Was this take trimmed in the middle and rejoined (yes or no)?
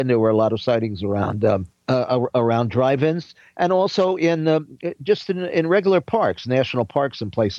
yes